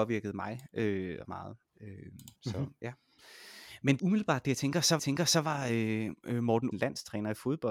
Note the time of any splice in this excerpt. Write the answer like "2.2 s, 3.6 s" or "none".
1.2 s, 2.4 s, 4.0 s, 5.0 s, 6.7 s